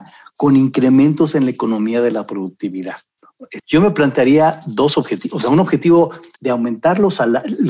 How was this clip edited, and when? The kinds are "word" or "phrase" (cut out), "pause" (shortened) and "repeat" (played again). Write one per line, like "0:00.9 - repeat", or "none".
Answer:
0:03.6 - word
0:06.3 - pause